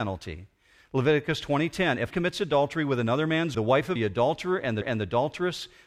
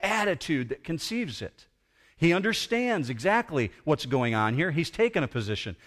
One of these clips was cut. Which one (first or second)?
first